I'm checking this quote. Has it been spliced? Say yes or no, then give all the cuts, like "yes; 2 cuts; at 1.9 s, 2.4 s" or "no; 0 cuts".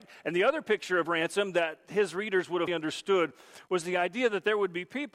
yes; 1 cut; at 2.7 s